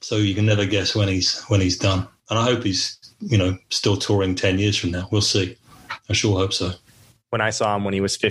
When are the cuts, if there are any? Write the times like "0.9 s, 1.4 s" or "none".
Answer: none

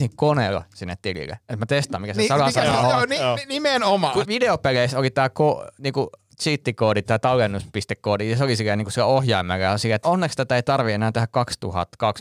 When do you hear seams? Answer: 4.2 s, 7.0 s, 10.0 s

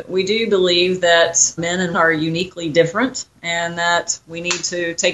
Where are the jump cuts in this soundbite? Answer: 1.6 s, 1.9 s

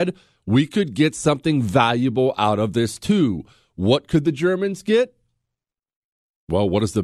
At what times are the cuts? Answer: none

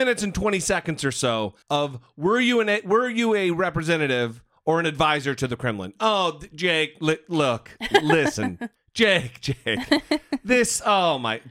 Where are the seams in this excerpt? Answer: 1.6 s, 8.8 s

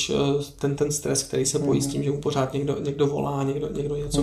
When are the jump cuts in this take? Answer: none

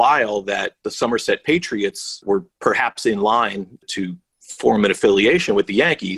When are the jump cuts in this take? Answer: none

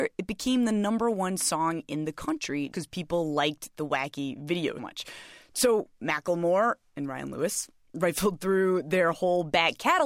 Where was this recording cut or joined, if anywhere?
2.7 s, 4.8 s

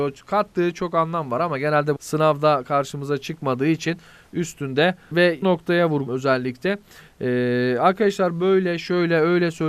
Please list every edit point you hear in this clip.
2.0 s, 5.1 s, 5.4 s, 6.1 s

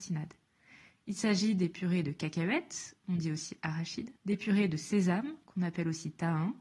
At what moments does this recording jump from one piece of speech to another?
4.2 s

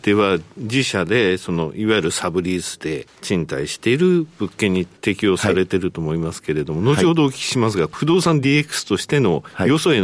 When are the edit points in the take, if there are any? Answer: none

